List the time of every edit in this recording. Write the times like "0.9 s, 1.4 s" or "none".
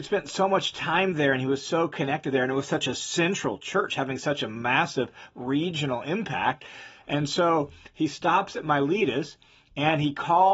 none